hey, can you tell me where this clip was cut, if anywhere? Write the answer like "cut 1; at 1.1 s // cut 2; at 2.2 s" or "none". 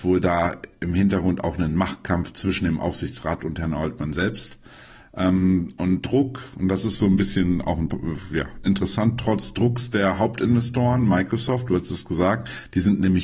cut 1; at 6.0 s // cut 2; at 8.6 s